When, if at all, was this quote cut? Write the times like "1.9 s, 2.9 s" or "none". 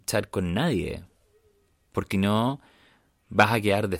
2.1 s